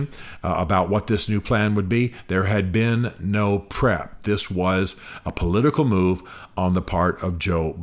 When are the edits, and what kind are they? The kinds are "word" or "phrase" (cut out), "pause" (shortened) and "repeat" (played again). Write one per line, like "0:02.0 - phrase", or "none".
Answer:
none